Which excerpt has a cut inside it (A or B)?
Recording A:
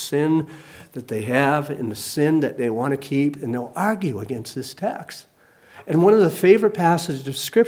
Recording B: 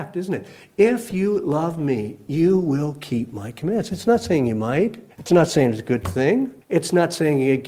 B